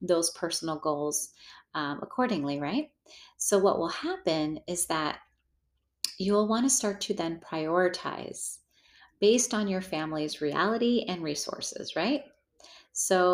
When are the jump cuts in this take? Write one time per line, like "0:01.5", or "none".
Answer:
none